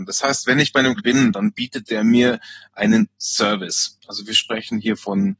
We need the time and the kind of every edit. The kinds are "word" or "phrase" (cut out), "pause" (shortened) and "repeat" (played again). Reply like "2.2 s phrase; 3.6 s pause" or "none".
1.0 s word